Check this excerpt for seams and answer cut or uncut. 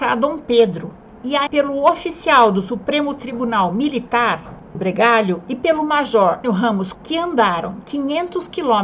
cut